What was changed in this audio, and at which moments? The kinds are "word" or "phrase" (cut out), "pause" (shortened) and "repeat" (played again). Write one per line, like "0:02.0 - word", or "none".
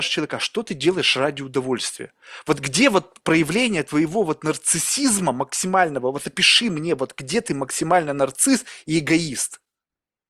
none